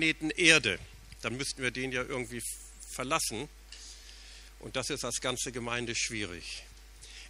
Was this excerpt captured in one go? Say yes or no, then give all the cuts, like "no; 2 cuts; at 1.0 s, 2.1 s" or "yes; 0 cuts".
yes; 0 cuts